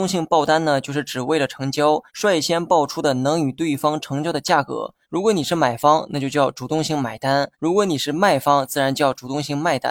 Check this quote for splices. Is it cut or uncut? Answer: cut